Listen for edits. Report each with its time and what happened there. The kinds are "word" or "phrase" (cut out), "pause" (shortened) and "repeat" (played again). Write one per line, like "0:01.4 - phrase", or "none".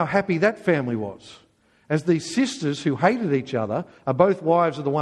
none